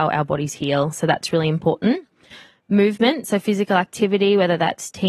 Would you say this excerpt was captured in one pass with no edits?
yes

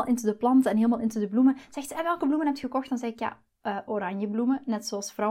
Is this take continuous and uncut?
yes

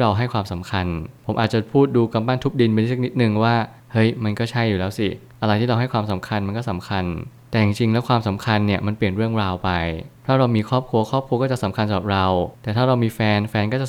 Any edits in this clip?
yes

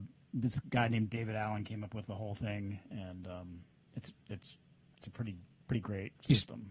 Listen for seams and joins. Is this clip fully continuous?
yes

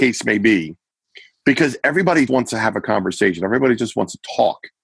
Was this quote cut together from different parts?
yes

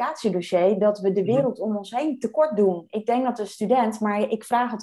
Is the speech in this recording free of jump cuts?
yes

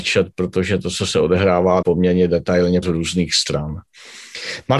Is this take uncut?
no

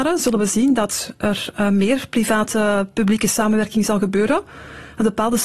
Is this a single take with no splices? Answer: yes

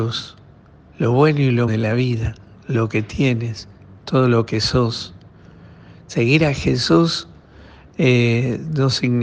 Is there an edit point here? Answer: yes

